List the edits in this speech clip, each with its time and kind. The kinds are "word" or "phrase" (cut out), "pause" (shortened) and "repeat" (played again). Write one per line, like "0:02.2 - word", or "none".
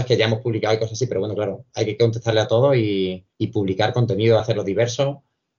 0:03.3 - pause
0:04.4 - phrase

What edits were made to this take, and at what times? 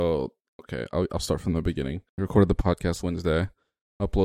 0:02.1 - pause
0:03.0 - word

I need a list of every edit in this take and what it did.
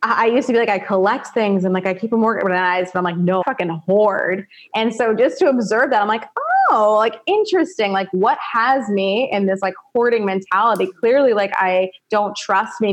0:03.4 - word

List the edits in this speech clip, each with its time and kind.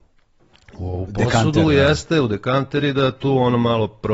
none

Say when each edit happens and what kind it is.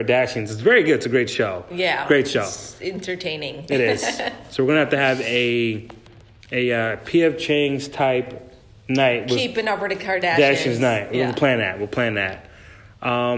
none

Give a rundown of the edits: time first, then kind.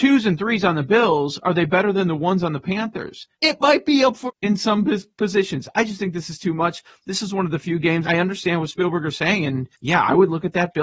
0:03.3 - pause
0:04.3 - word
0:08.0 - word
0:09.7 - pause

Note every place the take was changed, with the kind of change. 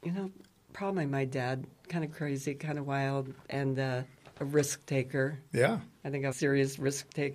0:03.5 - word
0:04.2 - pause
0:06.3 - phrase

